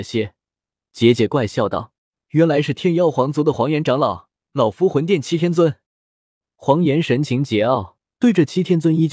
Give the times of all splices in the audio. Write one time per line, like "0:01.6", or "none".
0:02.0
0:04.4
0:05.9
0:08.0